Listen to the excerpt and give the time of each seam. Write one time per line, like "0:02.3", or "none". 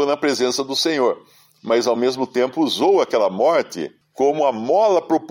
none